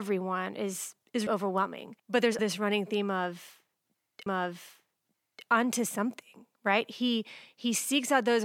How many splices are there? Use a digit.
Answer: 4